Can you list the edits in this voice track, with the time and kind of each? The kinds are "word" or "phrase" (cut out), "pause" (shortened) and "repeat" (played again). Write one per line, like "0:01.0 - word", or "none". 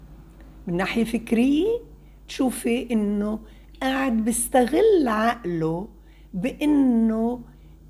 none